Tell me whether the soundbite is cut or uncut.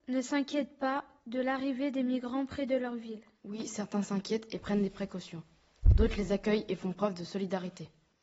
uncut